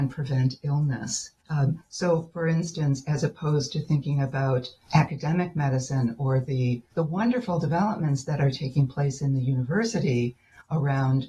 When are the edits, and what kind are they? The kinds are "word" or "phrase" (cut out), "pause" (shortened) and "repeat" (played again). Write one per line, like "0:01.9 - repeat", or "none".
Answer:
0:01.4 - pause
0:06.9 - pause